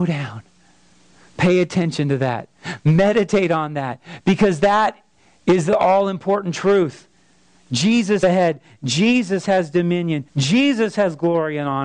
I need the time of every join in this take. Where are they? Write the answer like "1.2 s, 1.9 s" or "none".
8.2 s, 10.3 s

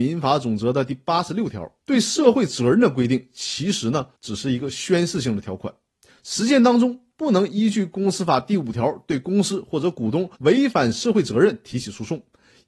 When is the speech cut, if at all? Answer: 1.8 s, 4.1 s, 10.3 s

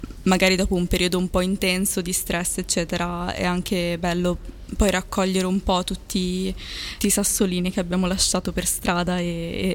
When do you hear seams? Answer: 4.7 s, 7.0 s

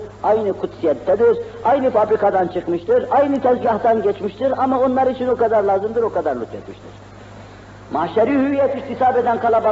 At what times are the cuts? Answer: none

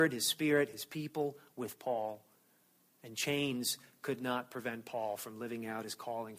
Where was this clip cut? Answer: none

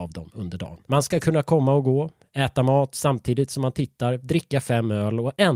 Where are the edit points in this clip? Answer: none

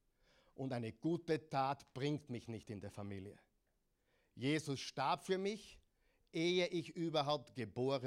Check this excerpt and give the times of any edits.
none

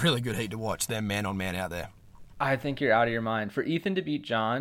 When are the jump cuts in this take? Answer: 2.3 s

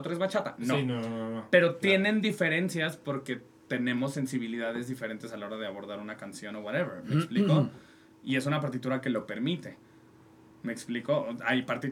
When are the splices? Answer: none

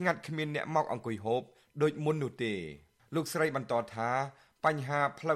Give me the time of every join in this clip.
none

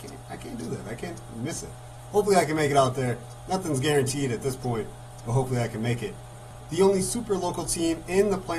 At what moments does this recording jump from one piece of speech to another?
none

